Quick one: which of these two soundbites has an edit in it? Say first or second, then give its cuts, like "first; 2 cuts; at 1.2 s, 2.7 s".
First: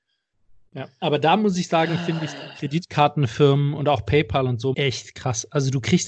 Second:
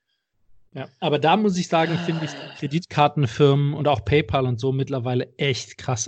first; 1 cut; at 4.7 s